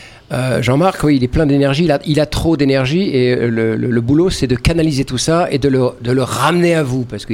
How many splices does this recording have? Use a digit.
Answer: 0